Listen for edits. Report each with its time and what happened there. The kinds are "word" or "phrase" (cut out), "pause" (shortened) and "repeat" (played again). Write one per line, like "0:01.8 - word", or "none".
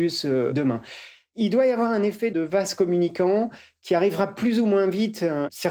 0:02.3 - word